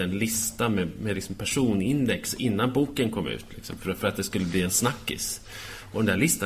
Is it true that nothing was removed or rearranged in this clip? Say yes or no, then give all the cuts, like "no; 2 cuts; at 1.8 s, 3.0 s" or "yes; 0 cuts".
yes; 0 cuts